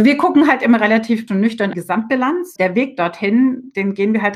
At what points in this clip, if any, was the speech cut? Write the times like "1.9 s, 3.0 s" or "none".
1.3 s, 1.7 s, 2.6 s